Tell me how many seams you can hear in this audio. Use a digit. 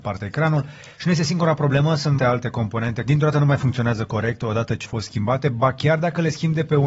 3